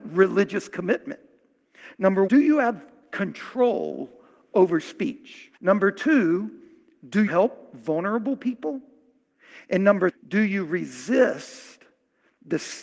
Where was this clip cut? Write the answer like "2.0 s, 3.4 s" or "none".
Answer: 2.3 s, 4.8 s, 5.6 s, 7.3 s, 10.1 s